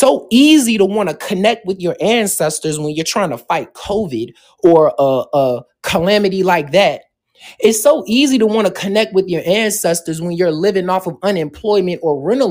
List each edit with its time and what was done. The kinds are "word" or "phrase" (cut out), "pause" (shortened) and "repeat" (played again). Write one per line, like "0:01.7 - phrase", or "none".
none